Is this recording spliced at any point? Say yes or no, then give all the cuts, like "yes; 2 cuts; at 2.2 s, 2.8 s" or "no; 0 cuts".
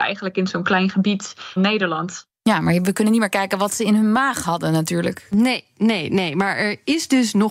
yes; 1 cut; at 1.6 s